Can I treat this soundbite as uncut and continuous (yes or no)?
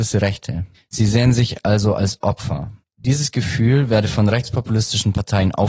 yes